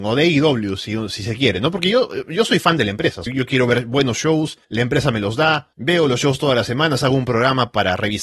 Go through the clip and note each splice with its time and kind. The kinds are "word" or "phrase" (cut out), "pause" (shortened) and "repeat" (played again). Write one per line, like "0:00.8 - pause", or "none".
0:03.3 - word
0:04.6 - pause
0:05.7 - pause